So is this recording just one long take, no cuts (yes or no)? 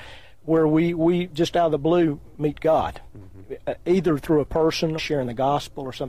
no